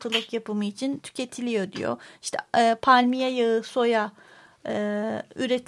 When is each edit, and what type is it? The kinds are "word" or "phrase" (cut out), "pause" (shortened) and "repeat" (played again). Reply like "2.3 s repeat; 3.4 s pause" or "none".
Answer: none